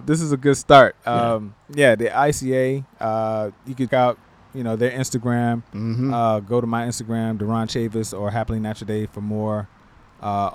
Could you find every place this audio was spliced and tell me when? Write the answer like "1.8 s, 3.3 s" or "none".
1.6 s, 3.6 s, 3.9 s